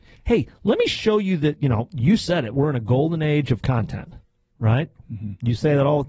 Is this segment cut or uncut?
uncut